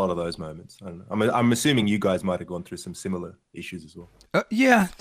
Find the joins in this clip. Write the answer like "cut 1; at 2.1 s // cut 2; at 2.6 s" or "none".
none